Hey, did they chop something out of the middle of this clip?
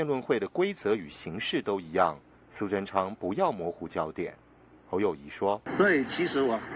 no; 0 cuts

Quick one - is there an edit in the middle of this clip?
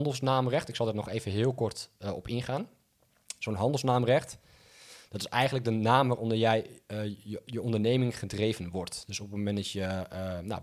no; 0 cuts

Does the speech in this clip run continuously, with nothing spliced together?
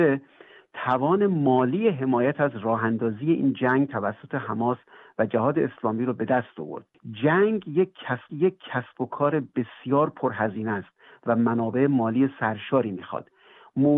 no; 1 cut; at 8.3 s

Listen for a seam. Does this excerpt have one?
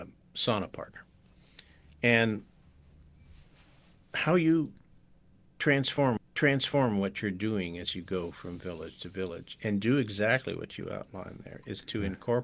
yes; 1 cut; at 6.2 s

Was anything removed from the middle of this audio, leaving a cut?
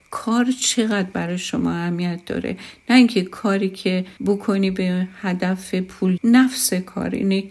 yes; 2 cuts; at 4.2 s, 6.2 s

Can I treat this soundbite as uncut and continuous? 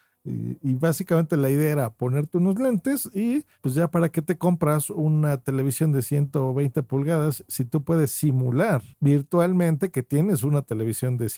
no; 1 cut; at 3.5 s

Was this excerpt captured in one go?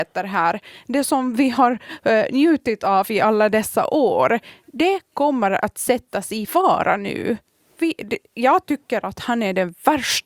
yes; 0 cuts

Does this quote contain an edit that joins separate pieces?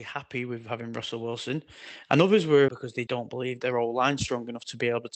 yes; 2 cuts; at 2.7 s, 3.1 s

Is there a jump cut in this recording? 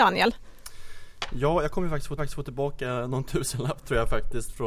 yes; 1 cut; at 2.2 s

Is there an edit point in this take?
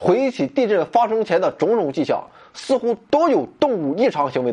no; 0 cuts

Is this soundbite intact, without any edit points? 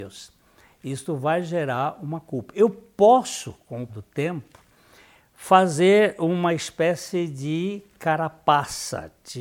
no; 1 cut; at 3.9 s

